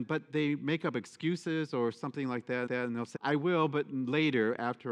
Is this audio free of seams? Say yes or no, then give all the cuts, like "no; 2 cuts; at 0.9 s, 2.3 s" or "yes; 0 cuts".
no; 2 cuts; at 2.7 s, 3.1 s